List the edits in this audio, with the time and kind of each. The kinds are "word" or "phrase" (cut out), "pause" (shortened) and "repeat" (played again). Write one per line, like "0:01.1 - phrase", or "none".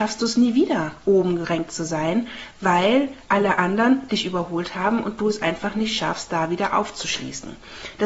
none